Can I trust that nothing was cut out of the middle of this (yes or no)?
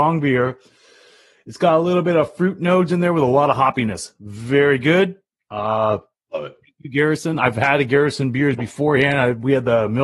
yes